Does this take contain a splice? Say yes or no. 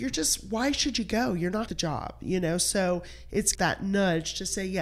yes